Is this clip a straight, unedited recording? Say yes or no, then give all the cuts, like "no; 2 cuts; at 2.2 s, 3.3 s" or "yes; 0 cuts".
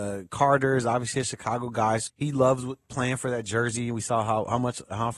no; 1 cut; at 2.1 s